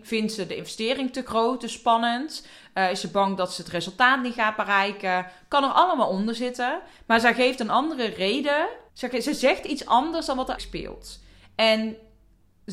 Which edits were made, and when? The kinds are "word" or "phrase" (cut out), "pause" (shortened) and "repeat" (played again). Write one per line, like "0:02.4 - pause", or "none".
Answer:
0:08.9 - pause
0:10.6 - word